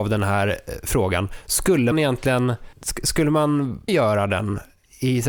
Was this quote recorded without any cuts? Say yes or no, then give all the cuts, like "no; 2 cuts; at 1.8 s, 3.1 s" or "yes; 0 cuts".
no; 3 cuts; at 1.9 s, 2.7 s, 3.9 s